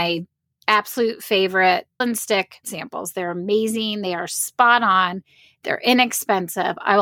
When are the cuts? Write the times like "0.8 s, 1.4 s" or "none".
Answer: 2.0 s, 2.6 s